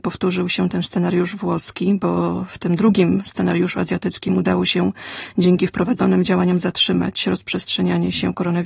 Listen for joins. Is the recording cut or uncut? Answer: uncut